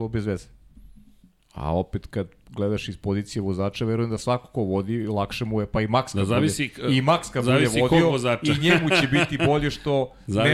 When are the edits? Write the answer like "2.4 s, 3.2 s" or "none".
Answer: none